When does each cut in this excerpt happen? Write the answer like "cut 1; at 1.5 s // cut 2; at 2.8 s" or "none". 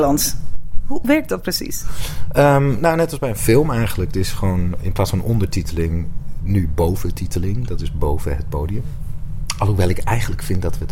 cut 1; at 1.0 s // cut 2; at 4.8 s

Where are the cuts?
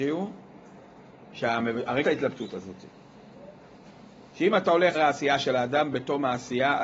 cut 1; at 2.0 s // cut 2; at 4.9 s

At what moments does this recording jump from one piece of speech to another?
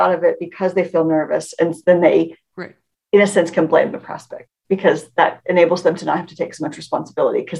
none

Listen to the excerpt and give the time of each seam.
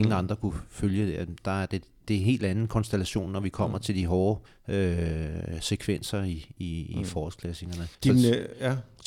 cut 1; at 2.0 s // cut 2; at 4.5 s // cut 3; at 7.9 s

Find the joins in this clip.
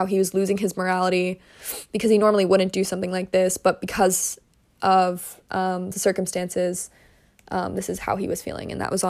none

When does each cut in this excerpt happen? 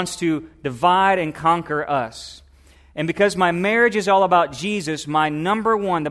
none

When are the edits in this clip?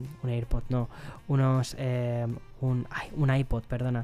none

